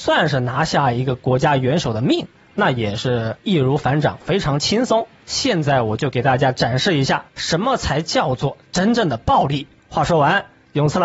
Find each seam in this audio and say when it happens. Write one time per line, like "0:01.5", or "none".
none